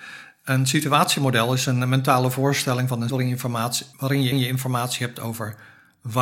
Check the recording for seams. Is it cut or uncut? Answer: cut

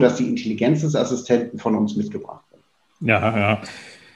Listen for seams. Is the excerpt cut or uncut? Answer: uncut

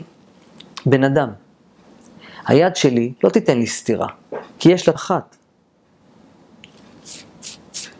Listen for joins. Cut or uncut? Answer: cut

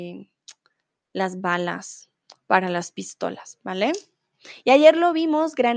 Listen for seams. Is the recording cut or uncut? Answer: uncut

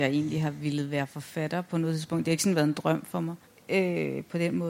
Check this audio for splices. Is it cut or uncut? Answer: cut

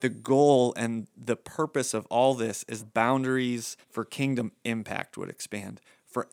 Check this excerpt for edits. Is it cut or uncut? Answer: cut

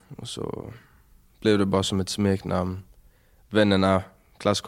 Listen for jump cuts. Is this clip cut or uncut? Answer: uncut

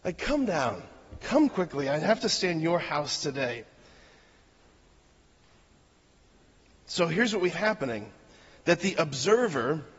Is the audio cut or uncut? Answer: cut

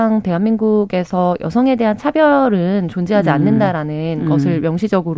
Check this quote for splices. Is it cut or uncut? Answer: uncut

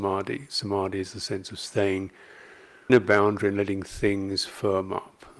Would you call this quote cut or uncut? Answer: cut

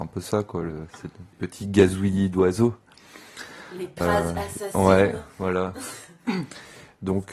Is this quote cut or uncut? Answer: cut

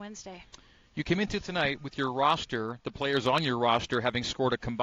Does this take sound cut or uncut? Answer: uncut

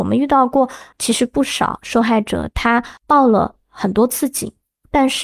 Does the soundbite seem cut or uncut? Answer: cut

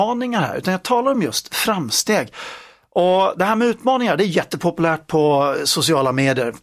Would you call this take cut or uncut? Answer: uncut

